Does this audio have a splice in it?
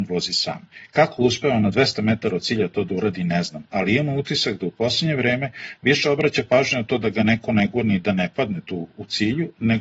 no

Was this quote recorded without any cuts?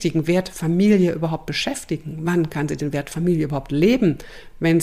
yes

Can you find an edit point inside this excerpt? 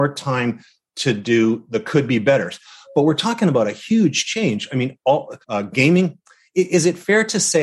yes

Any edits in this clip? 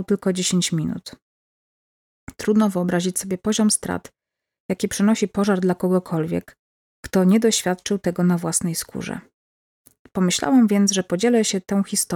no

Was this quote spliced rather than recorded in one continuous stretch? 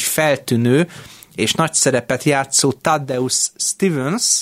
no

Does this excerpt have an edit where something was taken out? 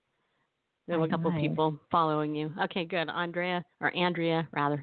yes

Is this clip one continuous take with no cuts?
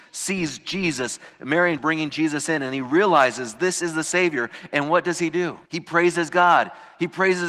no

